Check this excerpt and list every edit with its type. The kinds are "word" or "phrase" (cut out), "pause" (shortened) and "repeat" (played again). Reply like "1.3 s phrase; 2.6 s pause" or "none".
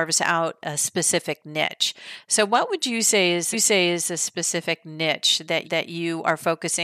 3.5 s repeat; 5.6 s repeat

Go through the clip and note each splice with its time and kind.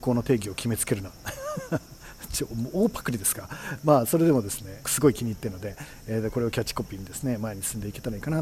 4.8 s phrase

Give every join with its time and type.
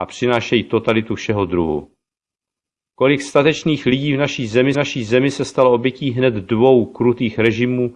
4.7 s repeat

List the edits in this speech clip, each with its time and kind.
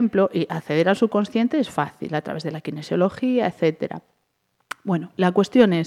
none

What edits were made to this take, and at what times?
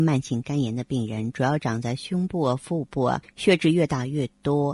3.2 s pause

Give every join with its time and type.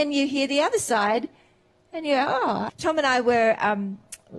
2.7 s word

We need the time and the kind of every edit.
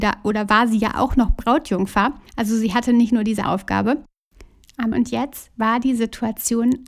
2.3 s pause; 3.4 s word; 4.9 s word

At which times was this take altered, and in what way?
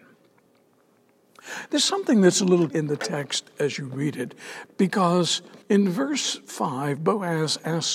2.7 s word; 5.6 s pause

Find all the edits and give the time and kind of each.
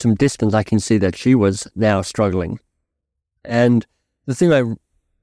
none

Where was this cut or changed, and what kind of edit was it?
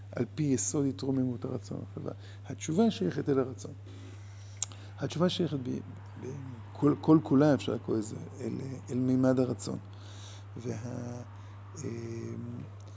none

